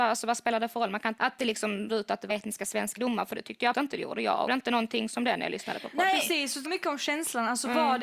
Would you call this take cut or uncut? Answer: cut